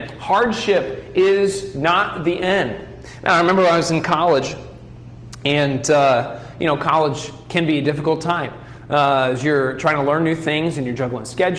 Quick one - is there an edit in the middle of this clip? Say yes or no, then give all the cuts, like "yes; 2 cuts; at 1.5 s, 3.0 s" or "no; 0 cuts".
no; 0 cuts